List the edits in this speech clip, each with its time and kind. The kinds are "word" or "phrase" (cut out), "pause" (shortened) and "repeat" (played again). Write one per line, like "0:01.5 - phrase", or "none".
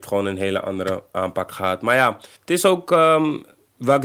0:02.4 - pause